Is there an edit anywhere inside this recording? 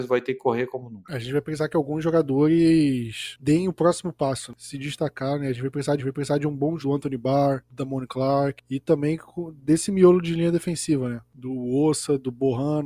yes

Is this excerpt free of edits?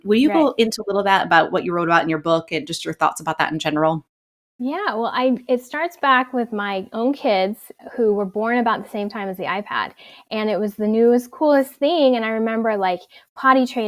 yes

